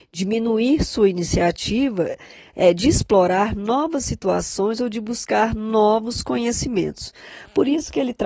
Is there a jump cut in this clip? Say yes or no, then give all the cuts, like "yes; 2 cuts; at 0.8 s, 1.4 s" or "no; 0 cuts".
no; 0 cuts